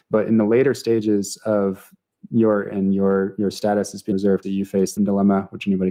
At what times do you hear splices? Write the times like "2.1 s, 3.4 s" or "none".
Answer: 2.7 s, 4.1 s, 4.4 s, 5.0 s